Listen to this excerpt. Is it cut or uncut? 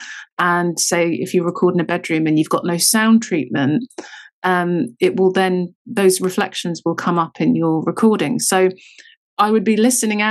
uncut